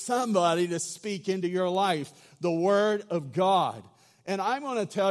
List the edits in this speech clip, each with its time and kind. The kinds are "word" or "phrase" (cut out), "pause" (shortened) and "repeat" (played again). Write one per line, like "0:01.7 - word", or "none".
none

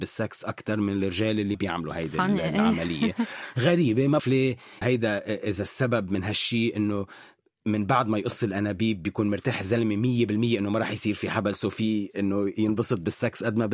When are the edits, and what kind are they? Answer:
0:01.5 - word
0:04.2 - word
0:04.8 - word

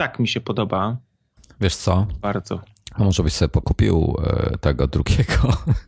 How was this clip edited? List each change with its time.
0:03.6 - word

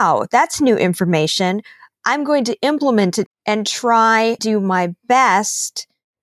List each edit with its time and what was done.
0:03.3 - word
0:04.4 - word

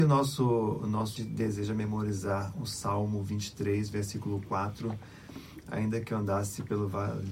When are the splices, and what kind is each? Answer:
0:01.2 - word

